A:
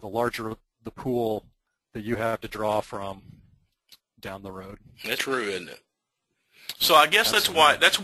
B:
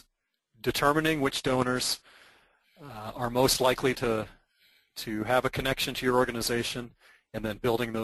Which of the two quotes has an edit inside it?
A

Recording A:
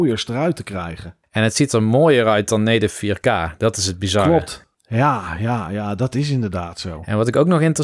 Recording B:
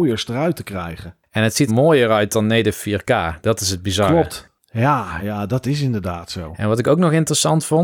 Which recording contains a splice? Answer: B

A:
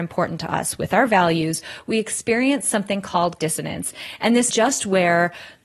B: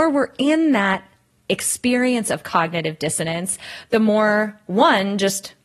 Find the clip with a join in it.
A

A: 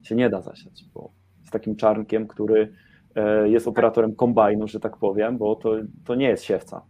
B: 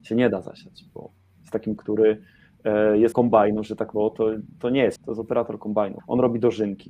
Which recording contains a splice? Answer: B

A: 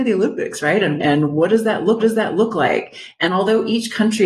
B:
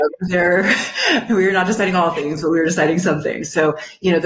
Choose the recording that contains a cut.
A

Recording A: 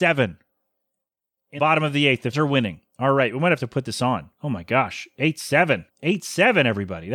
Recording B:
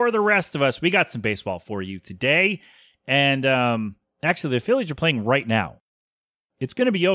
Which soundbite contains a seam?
A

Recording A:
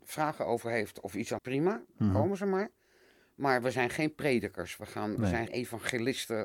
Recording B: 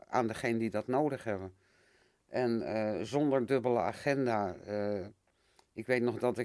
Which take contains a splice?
A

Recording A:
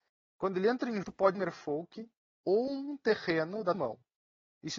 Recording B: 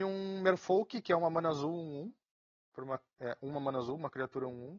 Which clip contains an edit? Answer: A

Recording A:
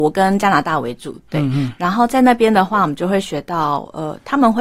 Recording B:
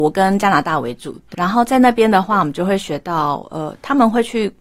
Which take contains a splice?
B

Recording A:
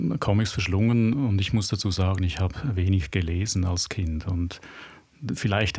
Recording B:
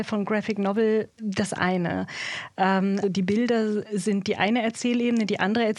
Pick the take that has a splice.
B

